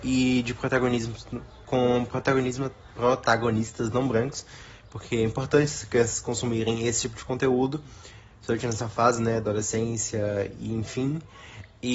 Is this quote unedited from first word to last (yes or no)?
yes